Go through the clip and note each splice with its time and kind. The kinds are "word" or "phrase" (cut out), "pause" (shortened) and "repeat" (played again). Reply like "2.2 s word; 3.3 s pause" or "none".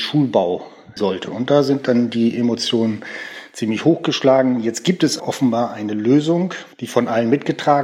1.0 s word; 5.2 s word; 6.7 s pause